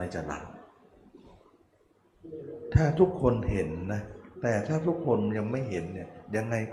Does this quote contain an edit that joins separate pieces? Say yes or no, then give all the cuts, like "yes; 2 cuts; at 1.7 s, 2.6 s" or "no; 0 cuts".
yes; 1 cut; at 4.3 s